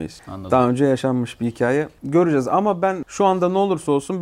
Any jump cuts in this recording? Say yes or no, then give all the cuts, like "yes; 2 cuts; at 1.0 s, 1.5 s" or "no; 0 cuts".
no; 0 cuts